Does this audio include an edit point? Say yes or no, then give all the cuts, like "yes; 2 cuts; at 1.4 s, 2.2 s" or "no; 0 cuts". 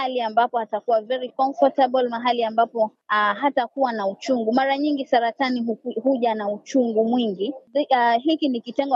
no; 0 cuts